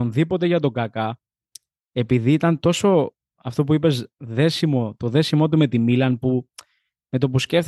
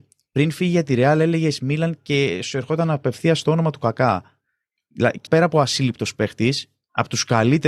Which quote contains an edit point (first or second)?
second